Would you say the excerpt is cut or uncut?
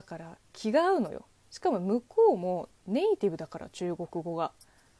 cut